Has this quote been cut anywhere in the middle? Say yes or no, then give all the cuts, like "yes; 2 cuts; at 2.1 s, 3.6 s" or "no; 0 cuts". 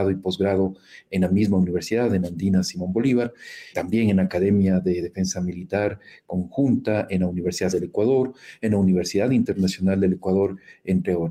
yes; 2 cuts; at 3.7 s, 7.7 s